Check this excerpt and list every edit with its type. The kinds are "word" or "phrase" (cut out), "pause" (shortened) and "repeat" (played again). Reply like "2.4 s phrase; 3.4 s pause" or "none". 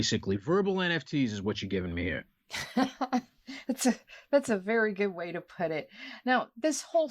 none